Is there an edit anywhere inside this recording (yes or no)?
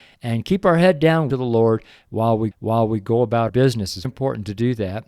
yes